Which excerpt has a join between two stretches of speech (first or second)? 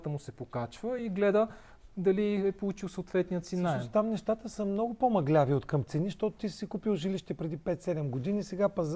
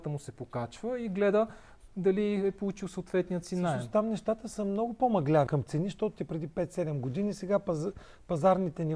second